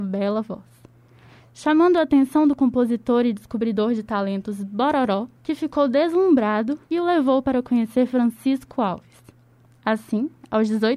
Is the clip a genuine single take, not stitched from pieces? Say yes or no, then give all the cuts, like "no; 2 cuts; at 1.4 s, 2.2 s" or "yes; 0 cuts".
no; 2 cuts; at 5.4 s, 6.9 s